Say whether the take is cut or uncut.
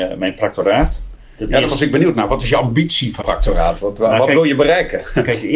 cut